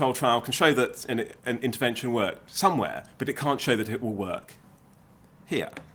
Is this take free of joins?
yes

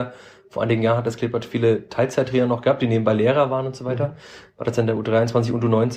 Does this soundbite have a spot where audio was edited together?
no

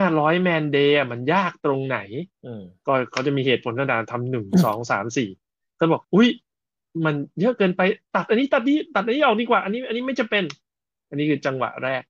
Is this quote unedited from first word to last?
no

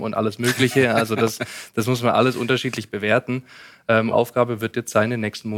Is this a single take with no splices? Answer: no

